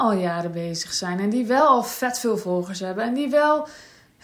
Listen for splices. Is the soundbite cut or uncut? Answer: uncut